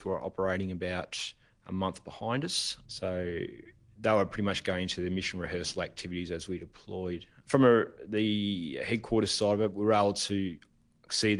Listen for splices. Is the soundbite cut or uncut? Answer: uncut